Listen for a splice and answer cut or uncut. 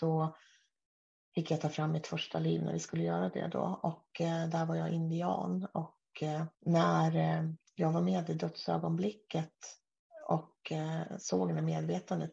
cut